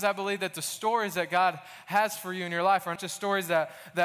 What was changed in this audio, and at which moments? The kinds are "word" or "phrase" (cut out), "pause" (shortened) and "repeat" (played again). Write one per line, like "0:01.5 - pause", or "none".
0:03.0 - word